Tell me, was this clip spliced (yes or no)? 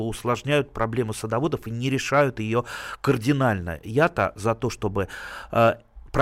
no